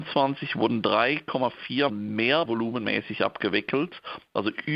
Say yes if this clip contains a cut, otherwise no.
yes